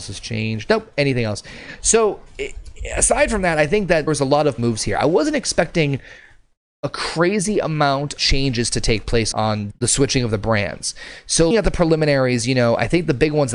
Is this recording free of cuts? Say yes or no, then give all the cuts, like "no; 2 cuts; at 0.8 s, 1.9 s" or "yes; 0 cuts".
no; 6 cuts; at 4.1 s, 4.6 s, 8.2 s, 9.3 s, 9.7 s, 11.5 s